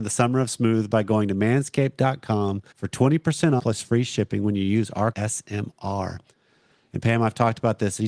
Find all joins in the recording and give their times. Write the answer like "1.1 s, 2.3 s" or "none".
2.7 s, 3.6 s, 5.1 s